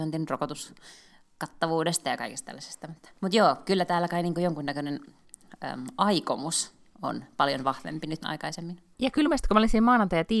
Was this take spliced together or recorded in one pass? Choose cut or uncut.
cut